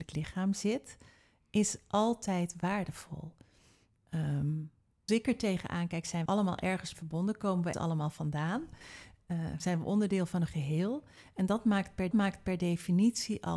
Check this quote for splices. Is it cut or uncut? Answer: cut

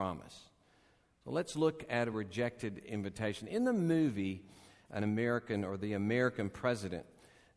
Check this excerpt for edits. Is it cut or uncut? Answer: uncut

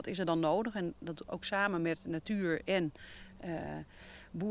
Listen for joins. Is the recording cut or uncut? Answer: uncut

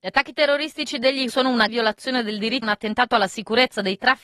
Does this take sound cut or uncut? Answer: cut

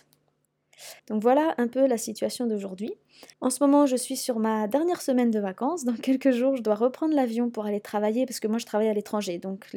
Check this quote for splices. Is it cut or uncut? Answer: cut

